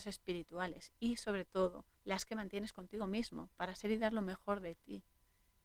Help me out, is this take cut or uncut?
cut